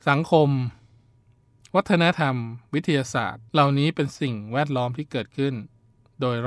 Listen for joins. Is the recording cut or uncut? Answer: cut